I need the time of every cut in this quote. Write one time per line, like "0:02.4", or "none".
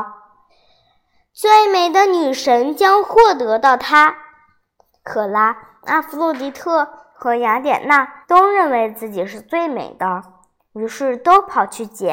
0:08.2